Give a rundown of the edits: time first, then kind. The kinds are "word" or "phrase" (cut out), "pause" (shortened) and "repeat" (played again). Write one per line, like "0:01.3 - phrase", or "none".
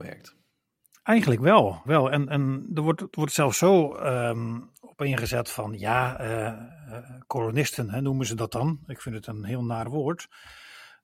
0:01.9 - word

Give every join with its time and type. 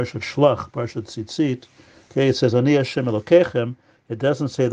none

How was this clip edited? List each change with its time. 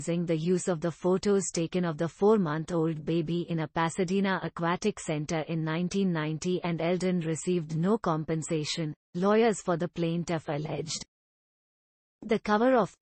none

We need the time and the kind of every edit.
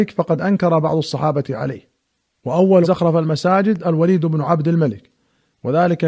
0:02.8 - word

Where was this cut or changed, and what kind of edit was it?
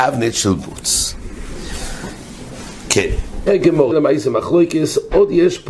0:03.5 - word
0:03.9 - phrase

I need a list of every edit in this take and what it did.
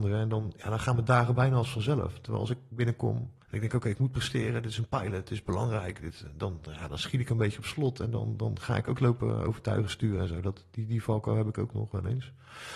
0:03.4 - pause

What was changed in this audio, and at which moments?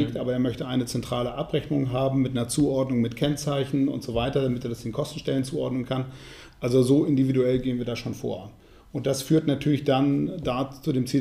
none

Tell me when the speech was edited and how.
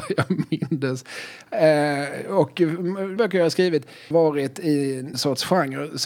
0:03.2 - word
0:04.1 - word
0:05.1 - word

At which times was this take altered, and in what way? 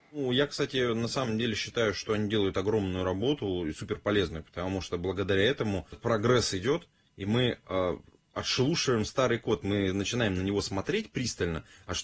0:05.9 - word

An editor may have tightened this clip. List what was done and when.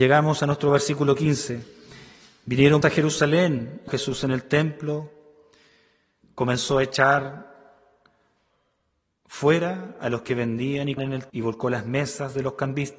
0:02.8 - word
0:03.9 - word
0:11.0 - word
0:11.3 - word

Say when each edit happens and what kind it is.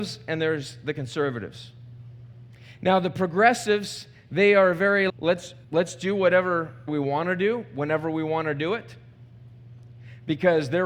0:05.1 - word
0:05.6 - pause
0:06.9 - word

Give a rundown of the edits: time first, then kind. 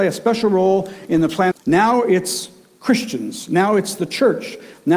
0:01.5 - phrase

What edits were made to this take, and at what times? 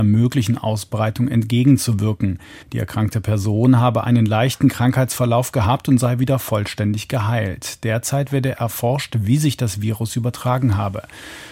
0:02.6 - pause

